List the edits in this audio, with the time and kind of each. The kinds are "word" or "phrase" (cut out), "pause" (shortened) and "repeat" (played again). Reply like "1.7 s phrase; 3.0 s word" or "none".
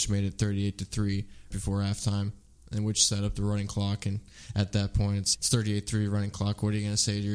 1.5 s word; 5.3 s word